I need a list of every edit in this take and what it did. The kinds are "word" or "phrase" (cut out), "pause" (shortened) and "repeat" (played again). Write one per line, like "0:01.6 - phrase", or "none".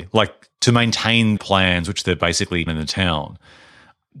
0:01.4 - word
0:02.7 - phrase